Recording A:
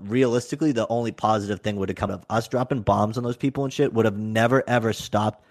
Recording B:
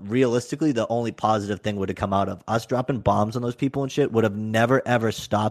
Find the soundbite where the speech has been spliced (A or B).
A